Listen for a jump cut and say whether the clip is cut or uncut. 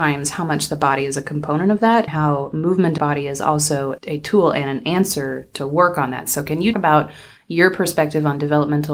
cut